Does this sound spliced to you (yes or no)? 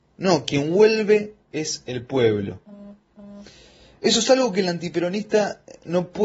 no